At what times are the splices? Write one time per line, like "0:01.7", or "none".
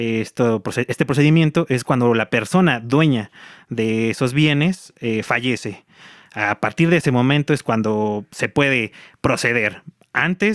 none

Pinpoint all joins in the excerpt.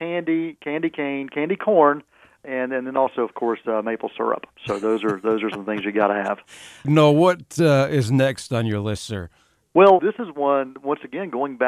0:10.0

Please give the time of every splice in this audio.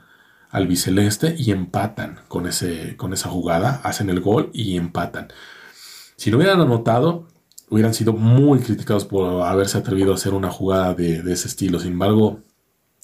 none

